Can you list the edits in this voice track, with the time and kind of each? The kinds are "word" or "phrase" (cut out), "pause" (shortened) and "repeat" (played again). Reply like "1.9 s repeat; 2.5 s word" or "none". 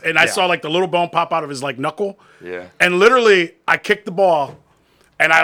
none